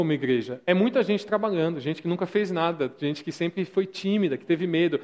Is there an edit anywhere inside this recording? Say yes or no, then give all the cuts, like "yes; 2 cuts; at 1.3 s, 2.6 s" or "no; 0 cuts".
no; 0 cuts